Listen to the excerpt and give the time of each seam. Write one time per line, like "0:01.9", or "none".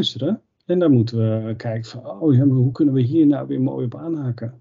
none